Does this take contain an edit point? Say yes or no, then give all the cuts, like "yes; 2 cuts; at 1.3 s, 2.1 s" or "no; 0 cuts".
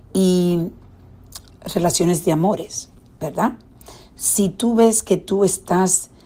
no; 0 cuts